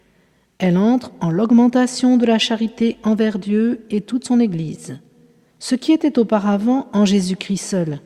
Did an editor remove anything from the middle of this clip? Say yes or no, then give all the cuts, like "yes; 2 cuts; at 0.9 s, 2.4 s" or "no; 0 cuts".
no; 0 cuts